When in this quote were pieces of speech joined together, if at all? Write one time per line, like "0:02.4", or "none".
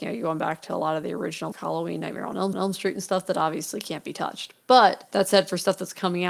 0:01.5
0:02.5

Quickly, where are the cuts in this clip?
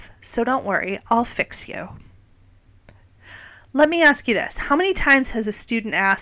none

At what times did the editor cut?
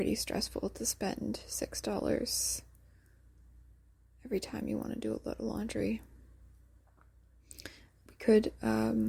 none

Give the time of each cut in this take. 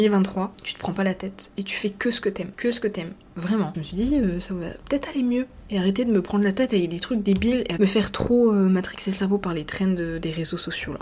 none

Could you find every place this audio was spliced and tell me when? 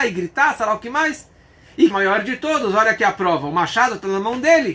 0:01.9

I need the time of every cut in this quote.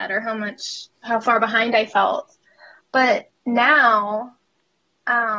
0:00.9
0:03.4

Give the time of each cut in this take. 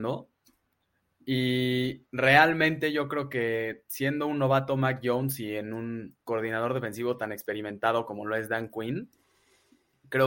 0:06.2

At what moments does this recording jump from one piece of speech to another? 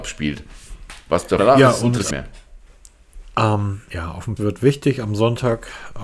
0:01.4
0:02.1
0:04.4

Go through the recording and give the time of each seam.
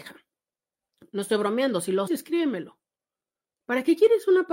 0:02.1

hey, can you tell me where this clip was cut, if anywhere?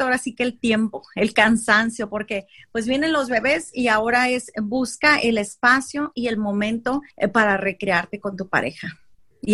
0:07.1

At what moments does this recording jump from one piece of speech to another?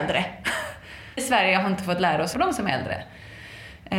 0:01.2
0:02.3

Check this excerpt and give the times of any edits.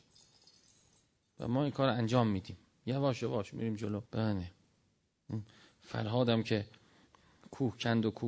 0:04.1

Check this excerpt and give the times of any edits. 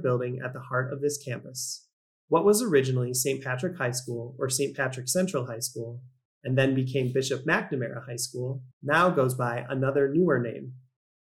0:08.7

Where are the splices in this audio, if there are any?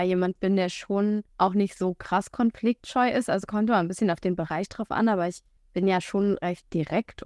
0:01.3
0:05.6

